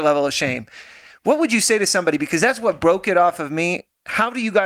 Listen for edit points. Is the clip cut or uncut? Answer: uncut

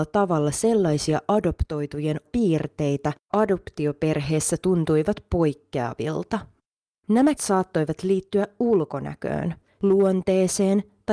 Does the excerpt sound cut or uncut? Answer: cut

